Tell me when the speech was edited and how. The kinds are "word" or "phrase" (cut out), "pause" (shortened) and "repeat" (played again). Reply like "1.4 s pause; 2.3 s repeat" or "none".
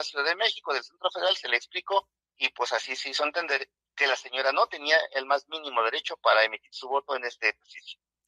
none